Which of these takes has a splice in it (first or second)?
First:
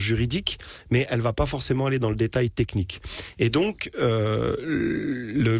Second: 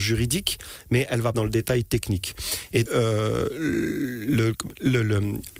second